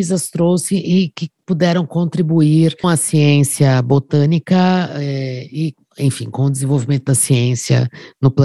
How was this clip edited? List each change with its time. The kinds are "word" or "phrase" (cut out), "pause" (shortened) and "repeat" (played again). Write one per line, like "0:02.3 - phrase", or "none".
0:02.8 - word